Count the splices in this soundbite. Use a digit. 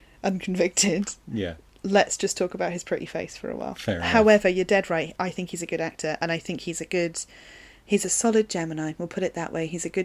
0